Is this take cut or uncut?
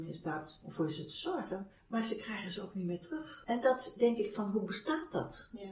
cut